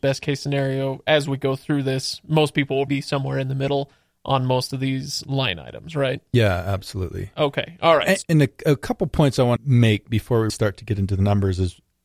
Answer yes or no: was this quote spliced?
yes